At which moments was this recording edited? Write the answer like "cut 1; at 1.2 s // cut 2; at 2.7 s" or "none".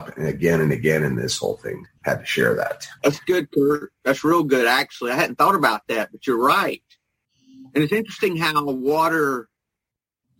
cut 1; at 1.9 s // cut 2; at 3.0 s